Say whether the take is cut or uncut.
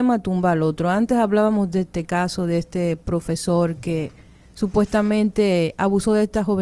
uncut